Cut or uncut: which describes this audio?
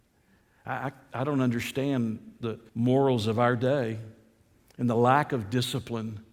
cut